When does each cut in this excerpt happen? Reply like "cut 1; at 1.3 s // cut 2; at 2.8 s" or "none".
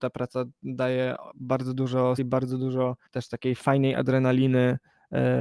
cut 1; at 2.2 s // cut 2; at 3.1 s